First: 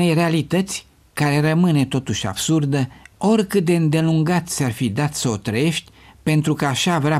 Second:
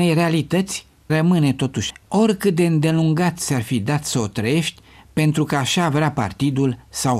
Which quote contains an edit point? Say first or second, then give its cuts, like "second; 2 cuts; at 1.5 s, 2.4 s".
second; 2 cuts; at 1.1 s, 1.9 s